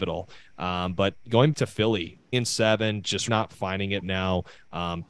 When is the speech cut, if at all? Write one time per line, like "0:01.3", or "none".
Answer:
0:01.5
0:02.3
0:03.3
0:04.0